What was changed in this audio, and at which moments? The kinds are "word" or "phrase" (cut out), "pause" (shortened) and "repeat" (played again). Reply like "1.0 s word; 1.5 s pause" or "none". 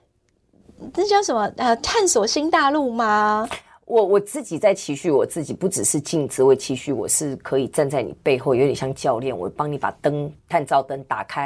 10.4 s pause